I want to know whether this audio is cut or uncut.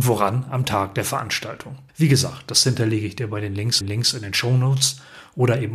cut